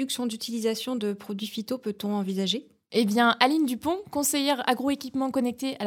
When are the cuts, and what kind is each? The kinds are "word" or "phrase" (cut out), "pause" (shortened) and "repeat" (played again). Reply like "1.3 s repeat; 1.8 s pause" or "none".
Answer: none